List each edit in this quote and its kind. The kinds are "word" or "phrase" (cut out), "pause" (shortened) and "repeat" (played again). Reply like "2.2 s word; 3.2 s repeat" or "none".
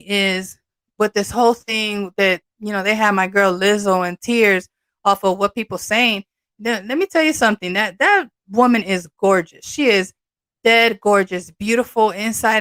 none